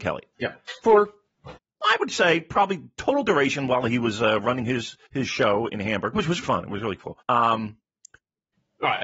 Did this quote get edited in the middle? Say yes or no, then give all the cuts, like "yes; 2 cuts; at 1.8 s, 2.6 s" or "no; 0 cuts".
yes; 3 cuts; at 5.1 s, 6.4 s, 7.2 s